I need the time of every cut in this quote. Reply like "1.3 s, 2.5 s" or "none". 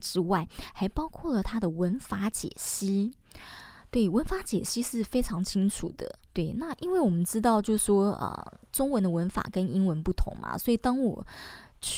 6.2 s

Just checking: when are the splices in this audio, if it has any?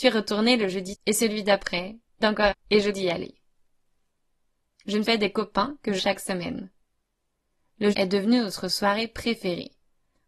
0.9 s, 2.2 s, 2.5 s, 2.9 s, 5.0 s, 6.0 s, 7.9 s

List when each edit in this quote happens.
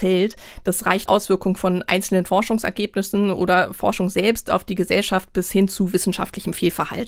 1.1 s

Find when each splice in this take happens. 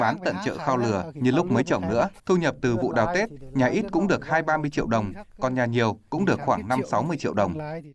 2.2 s

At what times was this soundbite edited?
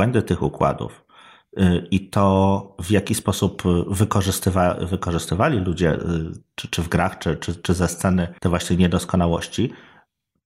8.4 s

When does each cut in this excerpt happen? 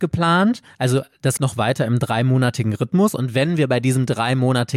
1.4 s

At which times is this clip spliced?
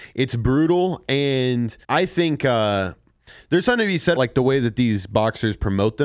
1.8 s, 4.1 s

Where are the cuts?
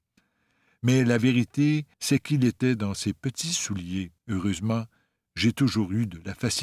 1.9 s, 4.2 s

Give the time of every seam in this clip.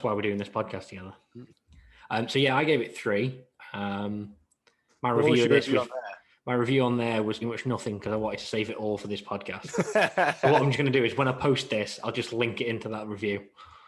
1.5 s, 7.4 s

